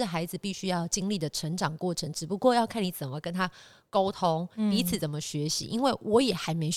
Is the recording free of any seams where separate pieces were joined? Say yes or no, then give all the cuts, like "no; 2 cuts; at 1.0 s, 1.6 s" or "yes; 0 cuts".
yes; 0 cuts